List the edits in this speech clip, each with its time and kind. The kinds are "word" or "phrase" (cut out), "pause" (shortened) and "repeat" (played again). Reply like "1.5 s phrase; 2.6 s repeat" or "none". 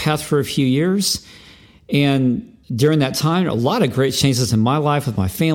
2.6 s pause